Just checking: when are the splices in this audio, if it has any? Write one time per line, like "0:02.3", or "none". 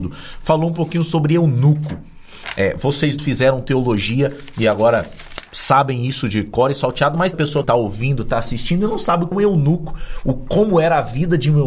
0:03.2
0:07.3
0:07.6
0:09.3